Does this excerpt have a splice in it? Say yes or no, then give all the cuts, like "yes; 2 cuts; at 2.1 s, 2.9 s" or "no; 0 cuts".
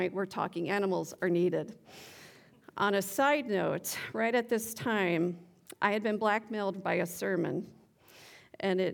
no; 0 cuts